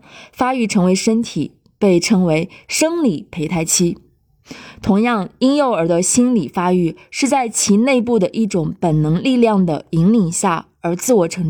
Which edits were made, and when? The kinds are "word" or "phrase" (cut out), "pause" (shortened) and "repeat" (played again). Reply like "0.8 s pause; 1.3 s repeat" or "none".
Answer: none